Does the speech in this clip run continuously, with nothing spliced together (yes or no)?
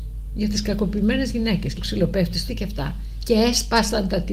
no